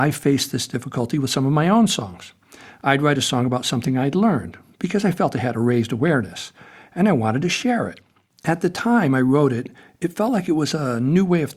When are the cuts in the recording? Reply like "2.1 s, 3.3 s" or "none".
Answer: none